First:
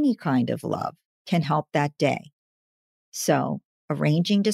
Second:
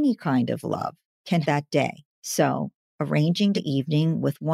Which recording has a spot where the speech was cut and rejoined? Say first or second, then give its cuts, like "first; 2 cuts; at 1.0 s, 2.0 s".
second; 3 cuts; at 1.4 s, 2.1 s, 3.6 s